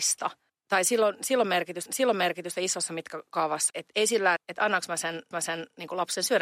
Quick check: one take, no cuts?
no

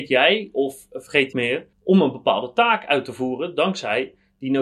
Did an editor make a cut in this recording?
yes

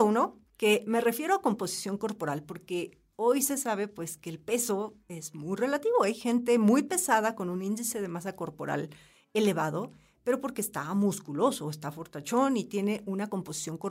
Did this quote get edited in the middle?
no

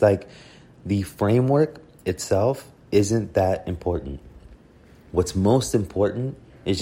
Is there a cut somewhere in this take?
no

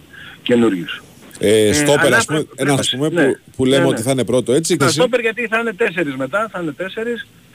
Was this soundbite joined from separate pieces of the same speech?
yes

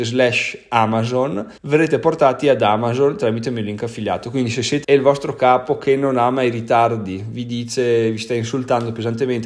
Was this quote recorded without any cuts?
no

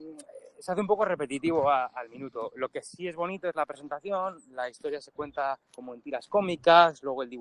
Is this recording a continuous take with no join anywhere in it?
no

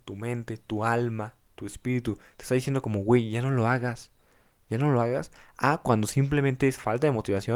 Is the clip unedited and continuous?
yes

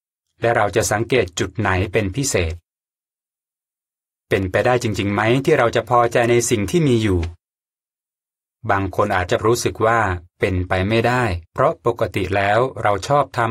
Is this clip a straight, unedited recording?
no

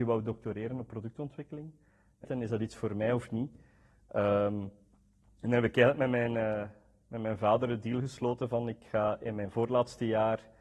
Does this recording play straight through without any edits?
no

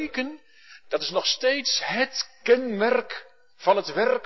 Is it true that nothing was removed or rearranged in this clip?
yes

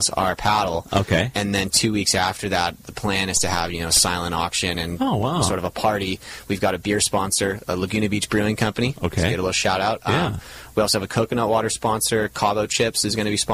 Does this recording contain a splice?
no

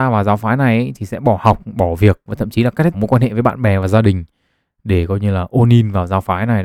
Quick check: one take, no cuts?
no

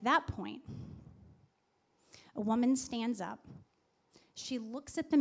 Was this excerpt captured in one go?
yes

